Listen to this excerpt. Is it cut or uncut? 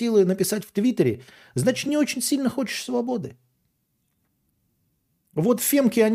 uncut